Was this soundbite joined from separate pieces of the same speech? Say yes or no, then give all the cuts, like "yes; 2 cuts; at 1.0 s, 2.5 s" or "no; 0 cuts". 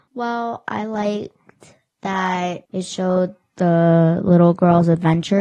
no; 0 cuts